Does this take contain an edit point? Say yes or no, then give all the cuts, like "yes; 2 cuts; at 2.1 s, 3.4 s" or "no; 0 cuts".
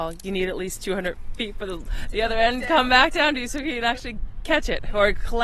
no; 0 cuts